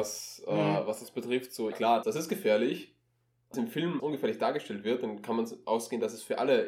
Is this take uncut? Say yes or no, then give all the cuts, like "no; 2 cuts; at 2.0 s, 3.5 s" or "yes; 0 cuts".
no; 4 cuts; at 1.7 s, 2.0 s, 3.5 s, 4.0 s